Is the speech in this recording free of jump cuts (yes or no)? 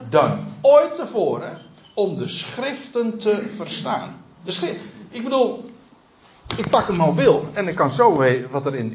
yes